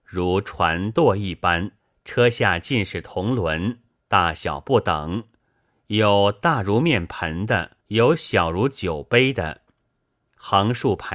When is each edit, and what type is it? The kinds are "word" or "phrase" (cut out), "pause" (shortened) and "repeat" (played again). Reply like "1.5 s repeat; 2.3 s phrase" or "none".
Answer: 1.8 s pause; 7.8 s pause